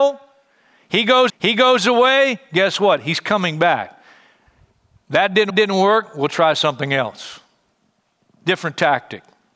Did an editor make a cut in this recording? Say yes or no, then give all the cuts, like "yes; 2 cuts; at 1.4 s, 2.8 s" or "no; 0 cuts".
yes; 2 cuts; at 1.3 s, 5.5 s